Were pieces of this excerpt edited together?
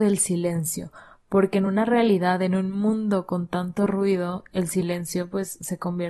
no; 0 cuts

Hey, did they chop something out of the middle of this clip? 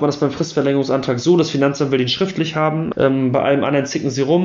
yes; 1 cut; at 2.9 s

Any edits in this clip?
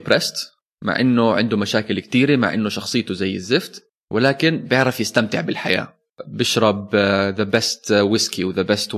no; 0 cuts

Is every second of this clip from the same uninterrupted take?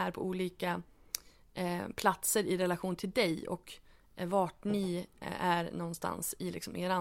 yes; 0 cuts

